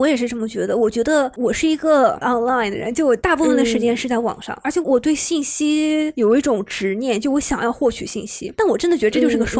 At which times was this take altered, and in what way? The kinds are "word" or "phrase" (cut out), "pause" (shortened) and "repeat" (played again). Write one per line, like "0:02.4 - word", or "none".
0:02.2 - word